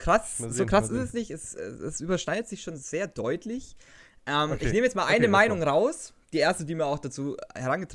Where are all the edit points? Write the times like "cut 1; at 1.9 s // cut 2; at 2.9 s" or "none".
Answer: none